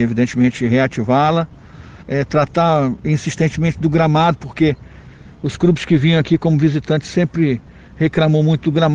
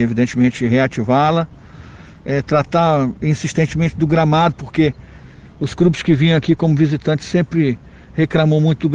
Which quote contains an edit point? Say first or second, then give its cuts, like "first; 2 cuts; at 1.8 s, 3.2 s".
first; 1 cut; at 2.0 s